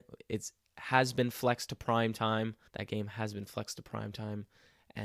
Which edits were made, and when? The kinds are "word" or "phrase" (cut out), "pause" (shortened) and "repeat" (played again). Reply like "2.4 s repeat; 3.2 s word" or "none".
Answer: 2.7 s pause